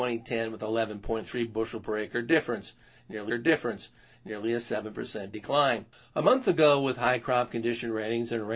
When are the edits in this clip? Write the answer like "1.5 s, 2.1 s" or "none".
3.3 s, 5.9 s